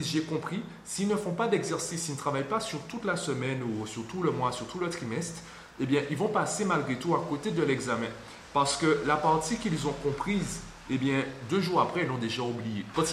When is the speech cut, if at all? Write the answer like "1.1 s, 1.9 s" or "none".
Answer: none